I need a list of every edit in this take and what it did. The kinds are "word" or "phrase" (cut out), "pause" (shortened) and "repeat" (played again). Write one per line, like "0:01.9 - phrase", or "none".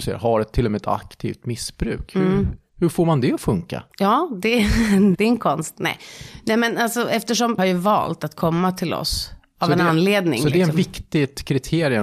0:03.9 - pause
0:05.1 - word
0:07.6 - phrase